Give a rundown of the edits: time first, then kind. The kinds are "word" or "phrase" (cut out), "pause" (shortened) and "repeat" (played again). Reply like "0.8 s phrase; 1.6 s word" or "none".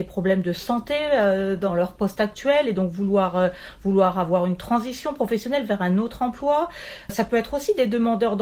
none